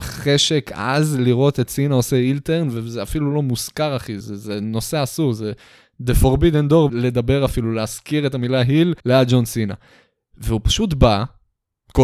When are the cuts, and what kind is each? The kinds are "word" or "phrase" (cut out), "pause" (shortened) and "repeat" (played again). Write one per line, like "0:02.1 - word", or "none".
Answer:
0:04.2 - word
0:06.9 - phrase
0:09.0 - pause

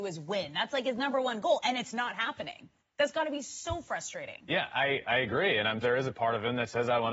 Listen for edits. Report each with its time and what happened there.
0:02.8 - pause
0:05.8 - word

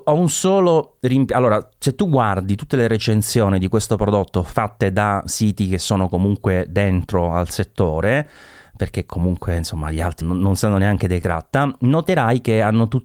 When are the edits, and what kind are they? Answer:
0:10.2 - word
0:11.2 - word

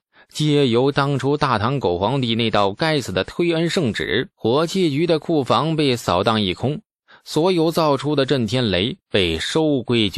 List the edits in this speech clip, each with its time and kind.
0:04.3 - pause

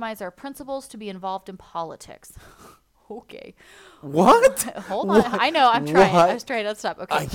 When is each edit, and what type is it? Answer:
none

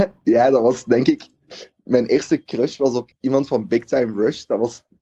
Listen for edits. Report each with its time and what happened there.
0:03.1 - word

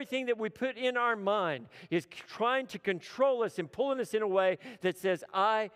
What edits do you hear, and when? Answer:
none

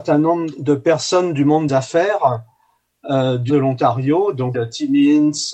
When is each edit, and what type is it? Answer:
0:01.7 - word
0:03.5 - word
0:04.5 - phrase

